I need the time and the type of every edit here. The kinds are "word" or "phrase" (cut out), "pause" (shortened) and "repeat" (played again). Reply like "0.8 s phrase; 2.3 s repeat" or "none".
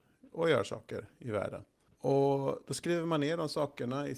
1.9 s pause

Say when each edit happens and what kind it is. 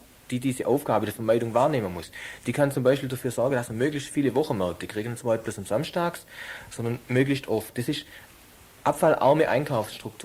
none

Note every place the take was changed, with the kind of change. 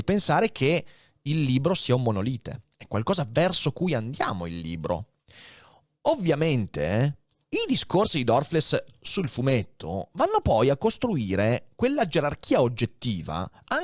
none

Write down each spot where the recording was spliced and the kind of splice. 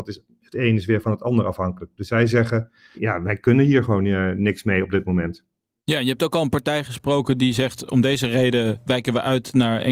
none

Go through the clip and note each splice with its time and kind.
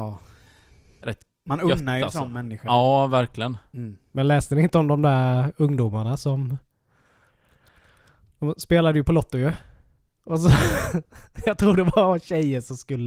none

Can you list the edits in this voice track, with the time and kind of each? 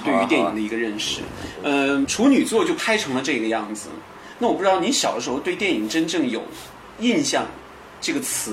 2.0 s word

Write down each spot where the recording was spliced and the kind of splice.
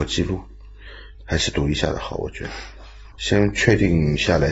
1.1 s pause; 3.1 s word

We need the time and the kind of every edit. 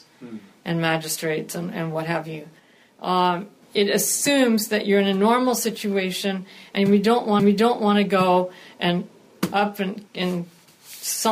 7.4 s repeat; 10.1 s pause

